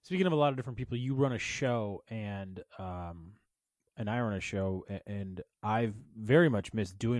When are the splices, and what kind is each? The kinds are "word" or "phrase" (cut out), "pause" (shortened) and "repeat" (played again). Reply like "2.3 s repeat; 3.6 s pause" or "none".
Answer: none